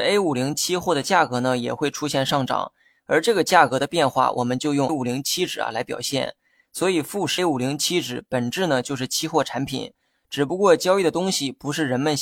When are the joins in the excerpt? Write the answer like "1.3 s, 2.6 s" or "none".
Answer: 4.9 s, 7.4 s